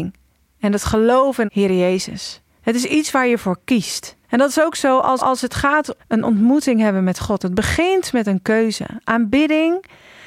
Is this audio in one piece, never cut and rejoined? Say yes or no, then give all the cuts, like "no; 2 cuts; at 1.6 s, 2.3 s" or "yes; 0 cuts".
no; 4 cuts; at 1.5 s, 4.2 s, 5.2 s, 6.0 s